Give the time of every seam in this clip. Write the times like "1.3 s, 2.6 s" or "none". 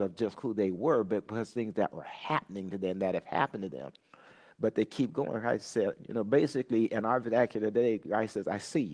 none